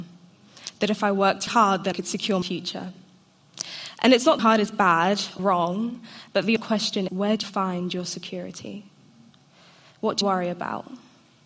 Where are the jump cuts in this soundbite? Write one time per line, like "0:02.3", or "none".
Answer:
0:01.5
0:01.9
0:02.4
0:04.4
0:05.4
0:06.6
0:07.1
0:07.4
0:10.2